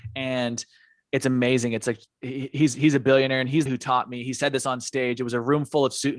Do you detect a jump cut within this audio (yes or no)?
yes